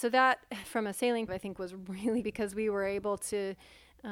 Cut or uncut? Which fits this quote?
cut